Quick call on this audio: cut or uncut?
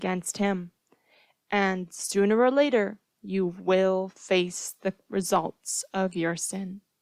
uncut